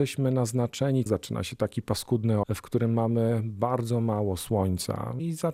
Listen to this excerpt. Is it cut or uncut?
cut